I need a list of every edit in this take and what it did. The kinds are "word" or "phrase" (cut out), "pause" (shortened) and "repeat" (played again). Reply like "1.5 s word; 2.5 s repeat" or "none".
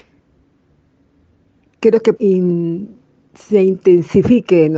2.2 s word